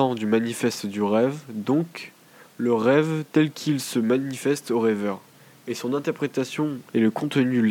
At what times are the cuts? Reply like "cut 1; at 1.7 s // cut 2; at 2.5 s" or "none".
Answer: none

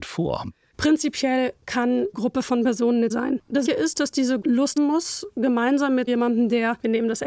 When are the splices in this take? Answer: cut 1; at 2.1 s // cut 2; at 3.1 s // cut 3; at 3.7 s // cut 4; at 4.4 s // cut 5; at 4.8 s // cut 6; at 6.1 s

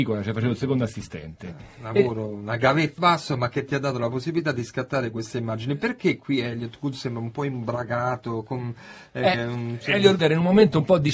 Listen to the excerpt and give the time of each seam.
cut 1; at 3.0 s // cut 2; at 9.3 s // cut 3; at 10.2 s

